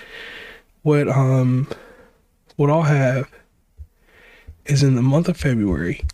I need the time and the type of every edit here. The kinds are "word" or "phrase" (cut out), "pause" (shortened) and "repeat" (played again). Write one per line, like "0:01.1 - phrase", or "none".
none